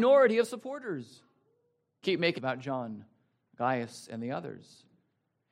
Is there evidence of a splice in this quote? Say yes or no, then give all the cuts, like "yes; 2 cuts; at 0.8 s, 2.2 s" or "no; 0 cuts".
yes; 2 cuts; at 2.0 s, 2.4 s